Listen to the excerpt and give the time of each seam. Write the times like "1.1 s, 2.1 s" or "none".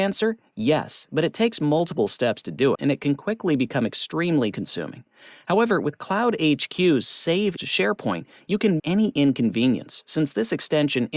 2.7 s, 4.5 s, 7.6 s, 8.8 s